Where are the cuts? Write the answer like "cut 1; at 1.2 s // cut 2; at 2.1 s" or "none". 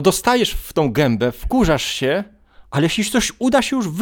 none